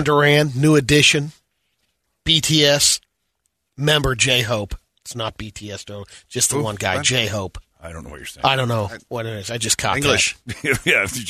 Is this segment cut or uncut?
uncut